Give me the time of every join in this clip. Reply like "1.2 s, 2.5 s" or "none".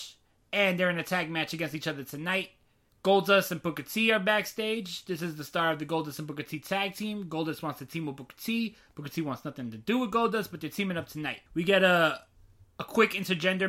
2.9 s, 11.5 s